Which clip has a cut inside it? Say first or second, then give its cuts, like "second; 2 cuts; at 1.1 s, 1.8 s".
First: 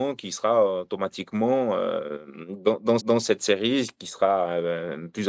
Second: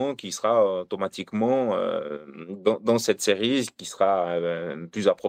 first; 1 cut; at 3.0 s